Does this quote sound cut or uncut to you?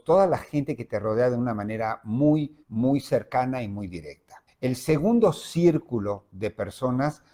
cut